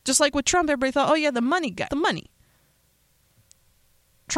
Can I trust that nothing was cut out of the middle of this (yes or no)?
no